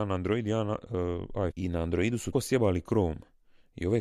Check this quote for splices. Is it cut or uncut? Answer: cut